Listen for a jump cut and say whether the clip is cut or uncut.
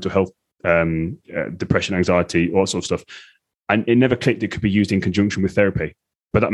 uncut